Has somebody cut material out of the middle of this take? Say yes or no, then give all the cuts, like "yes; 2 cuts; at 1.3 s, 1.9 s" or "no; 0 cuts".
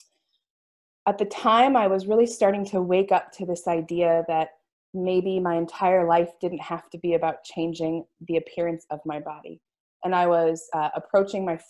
no; 0 cuts